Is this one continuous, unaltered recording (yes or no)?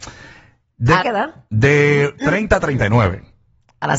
no